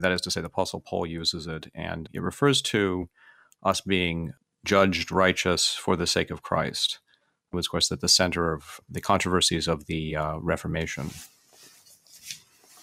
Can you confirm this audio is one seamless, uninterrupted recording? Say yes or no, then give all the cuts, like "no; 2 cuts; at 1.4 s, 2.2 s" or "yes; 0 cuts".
yes; 0 cuts